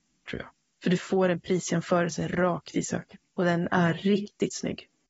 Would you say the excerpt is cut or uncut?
cut